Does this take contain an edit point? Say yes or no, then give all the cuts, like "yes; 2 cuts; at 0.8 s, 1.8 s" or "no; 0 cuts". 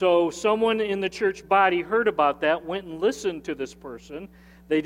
no; 0 cuts